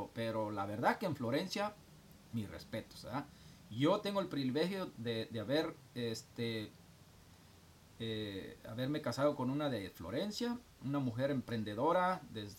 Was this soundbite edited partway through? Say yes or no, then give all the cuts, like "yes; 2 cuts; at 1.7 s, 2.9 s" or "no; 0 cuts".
no; 0 cuts